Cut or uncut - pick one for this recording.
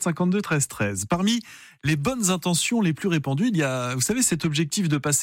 uncut